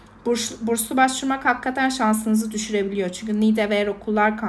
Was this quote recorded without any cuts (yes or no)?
yes